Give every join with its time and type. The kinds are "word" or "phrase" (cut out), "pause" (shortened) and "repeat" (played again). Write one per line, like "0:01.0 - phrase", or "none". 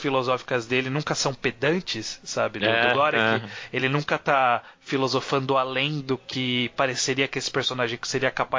none